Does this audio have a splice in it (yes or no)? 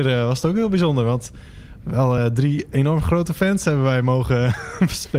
no